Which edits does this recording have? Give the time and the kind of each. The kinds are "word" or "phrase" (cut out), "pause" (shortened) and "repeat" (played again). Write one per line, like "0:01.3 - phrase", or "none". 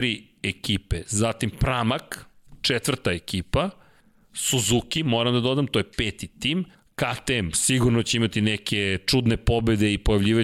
0:04.0 - pause
0:06.7 - pause

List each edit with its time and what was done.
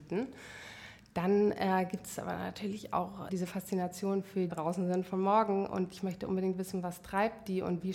0:03.3 - word
0:04.5 - phrase

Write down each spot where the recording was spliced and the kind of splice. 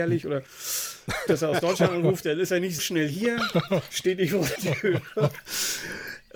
0:01.3 - word
0:02.8 - word
0:04.6 - word

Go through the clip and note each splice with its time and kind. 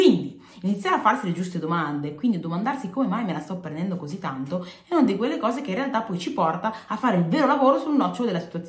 none

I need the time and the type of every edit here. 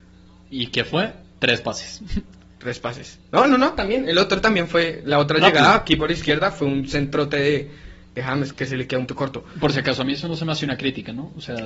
0:08.5 - word
0:09.1 - word

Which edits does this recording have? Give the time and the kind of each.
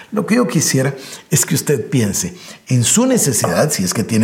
none

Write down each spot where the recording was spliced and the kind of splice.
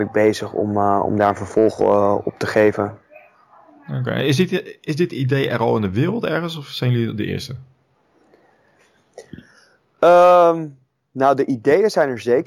none

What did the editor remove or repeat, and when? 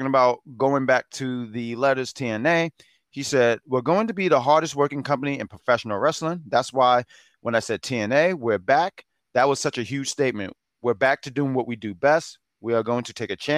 none

